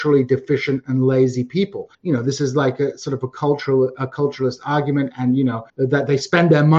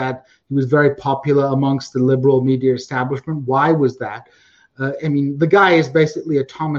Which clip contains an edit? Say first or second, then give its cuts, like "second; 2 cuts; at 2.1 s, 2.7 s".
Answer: first; 2 cuts; at 1.9 s, 5.7 s